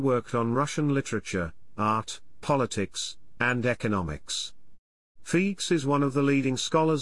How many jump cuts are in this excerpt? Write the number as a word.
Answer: zero